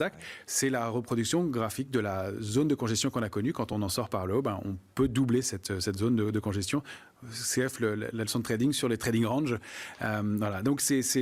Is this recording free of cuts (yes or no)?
yes